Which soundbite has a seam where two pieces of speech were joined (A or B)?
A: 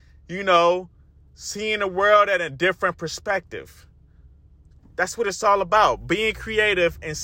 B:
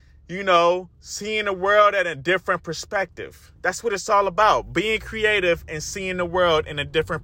B